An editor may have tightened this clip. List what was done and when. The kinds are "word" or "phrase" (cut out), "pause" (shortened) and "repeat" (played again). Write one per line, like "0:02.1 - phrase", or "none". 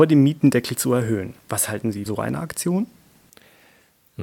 0:01.4 - pause
0:02.1 - word